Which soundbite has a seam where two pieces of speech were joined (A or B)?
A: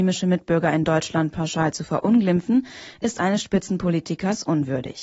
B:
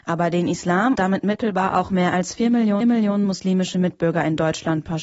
B